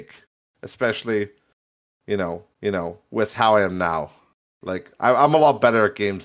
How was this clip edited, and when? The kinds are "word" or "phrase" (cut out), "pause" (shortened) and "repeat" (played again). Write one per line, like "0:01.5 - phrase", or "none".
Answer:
0:02.5 - repeat